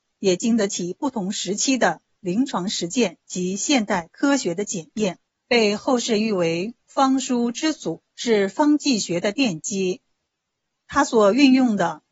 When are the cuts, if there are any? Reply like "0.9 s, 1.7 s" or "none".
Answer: 3.2 s, 5.3 s, 8.1 s, 10.3 s